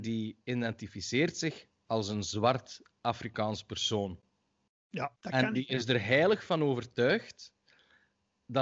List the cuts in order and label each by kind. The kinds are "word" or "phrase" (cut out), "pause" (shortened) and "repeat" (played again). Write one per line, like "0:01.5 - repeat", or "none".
0:05.2 - pause